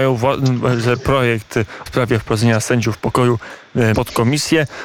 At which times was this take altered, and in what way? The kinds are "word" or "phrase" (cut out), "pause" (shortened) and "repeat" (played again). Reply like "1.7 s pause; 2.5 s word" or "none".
1.9 s word; 3.9 s phrase